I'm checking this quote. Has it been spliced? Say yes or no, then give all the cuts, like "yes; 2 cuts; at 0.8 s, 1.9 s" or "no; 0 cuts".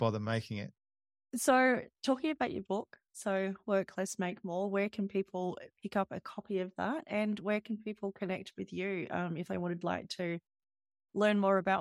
yes; 1 cut; at 8.5 s